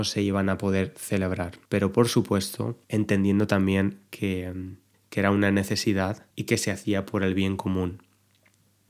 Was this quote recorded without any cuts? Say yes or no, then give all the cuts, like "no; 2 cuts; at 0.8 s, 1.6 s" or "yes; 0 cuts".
no; 4 cuts; at 1.6 s, 2.8 s, 4.9 s, 6.3 s